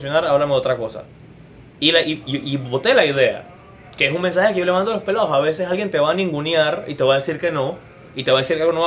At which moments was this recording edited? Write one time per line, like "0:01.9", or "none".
none